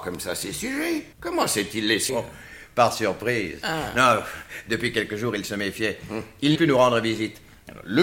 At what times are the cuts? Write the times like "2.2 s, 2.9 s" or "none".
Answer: 1.1 s, 2.1 s, 6.5 s

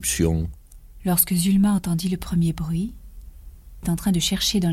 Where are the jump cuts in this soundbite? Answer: 3.8 s

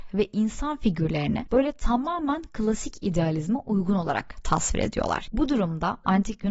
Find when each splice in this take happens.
none

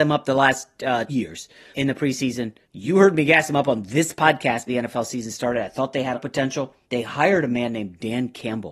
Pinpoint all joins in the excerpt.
1.1 s, 1.7 s, 2.6 s, 4.7 s, 6.1 s, 6.8 s

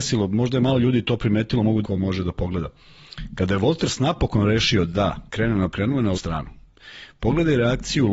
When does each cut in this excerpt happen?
1.8 s, 5.3 s, 5.7 s, 6.1 s

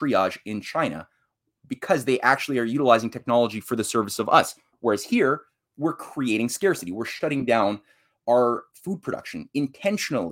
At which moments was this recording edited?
none

